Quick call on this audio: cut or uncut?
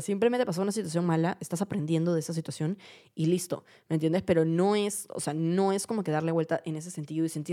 uncut